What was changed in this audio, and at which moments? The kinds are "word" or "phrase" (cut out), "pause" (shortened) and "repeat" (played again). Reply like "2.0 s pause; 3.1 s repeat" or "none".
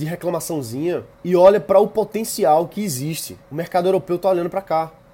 1.1 s pause; 3.4 s pause